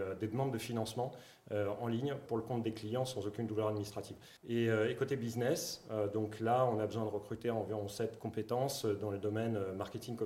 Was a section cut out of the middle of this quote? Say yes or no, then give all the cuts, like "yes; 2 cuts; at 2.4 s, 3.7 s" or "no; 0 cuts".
yes; 2 cuts; at 2.3 s, 4.4 s